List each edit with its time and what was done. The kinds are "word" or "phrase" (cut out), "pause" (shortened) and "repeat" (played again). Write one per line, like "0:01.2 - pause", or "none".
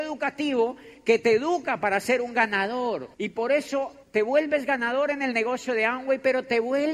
0:03.1 - pause
0:04.0 - pause